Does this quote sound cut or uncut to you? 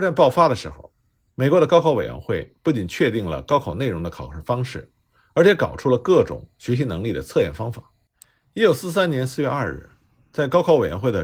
uncut